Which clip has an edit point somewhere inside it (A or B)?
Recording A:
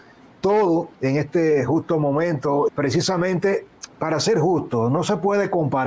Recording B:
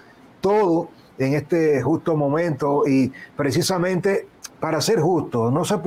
A